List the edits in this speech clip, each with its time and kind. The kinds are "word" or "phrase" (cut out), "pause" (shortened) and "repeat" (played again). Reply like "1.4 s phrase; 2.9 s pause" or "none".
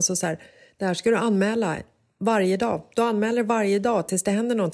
none